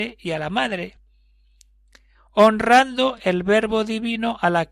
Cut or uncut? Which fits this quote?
uncut